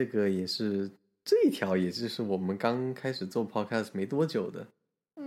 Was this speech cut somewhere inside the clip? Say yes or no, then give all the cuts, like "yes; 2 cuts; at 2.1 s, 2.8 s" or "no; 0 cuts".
no; 0 cuts